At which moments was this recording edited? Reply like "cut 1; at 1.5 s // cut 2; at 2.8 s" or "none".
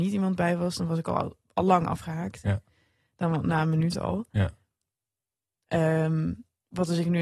none